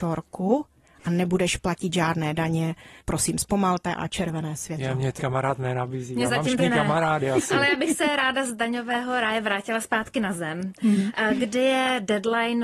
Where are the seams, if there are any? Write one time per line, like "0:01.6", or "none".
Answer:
0:05.2
0:06.6

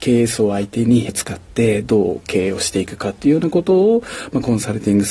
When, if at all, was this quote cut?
0:01.1

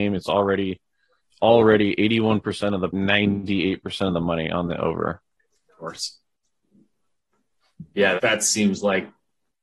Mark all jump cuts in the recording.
0:02.9
0:08.2

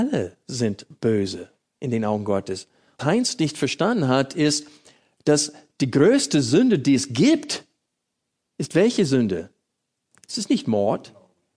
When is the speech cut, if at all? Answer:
0:03.0

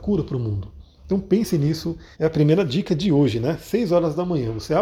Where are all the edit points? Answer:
0:02.1

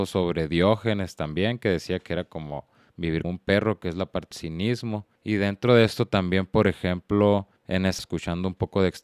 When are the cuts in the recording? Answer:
0:03.2
0:04.3
0:05.2
0:07.6
0:08.0

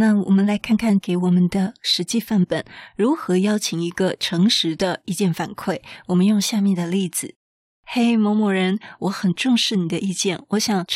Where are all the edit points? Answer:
0:01.0

